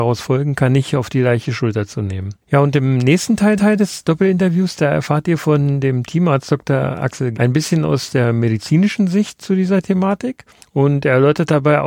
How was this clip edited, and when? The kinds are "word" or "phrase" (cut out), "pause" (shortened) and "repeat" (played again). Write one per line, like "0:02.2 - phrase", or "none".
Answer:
0:02.4 - pause
0:03.6 - repeat
0:07.3 - word
0:10.6 - pause

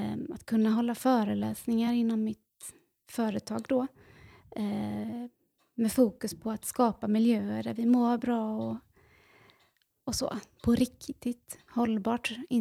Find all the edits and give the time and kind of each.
none

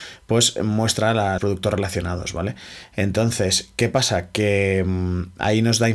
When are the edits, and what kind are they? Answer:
0:01.4 - word

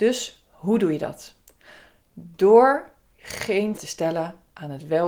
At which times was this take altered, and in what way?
0:03.8 - word

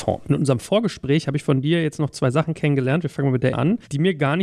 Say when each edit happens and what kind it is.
0:03.5 - word

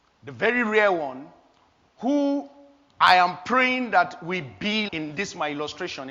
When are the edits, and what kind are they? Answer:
0:04.9 - word

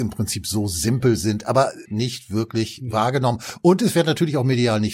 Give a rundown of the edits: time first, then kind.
0:01.9 - phrase

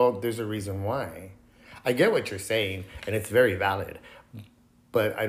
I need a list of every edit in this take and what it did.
none

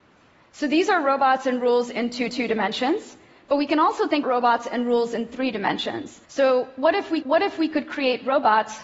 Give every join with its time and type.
0:02.3 - repeat
0:04.2 - word
0:06.3 - pause
0:07.2 - repeat

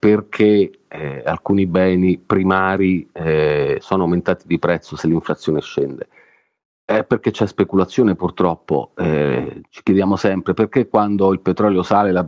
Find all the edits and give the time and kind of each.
none

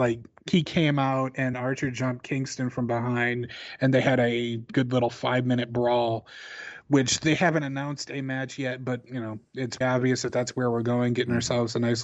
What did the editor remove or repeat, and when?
0:01.5 - word
0:04.7 - word
0:09.8 - word

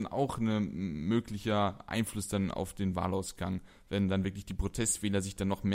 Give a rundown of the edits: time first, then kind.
none

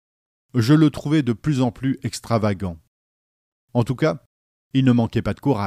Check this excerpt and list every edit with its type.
none

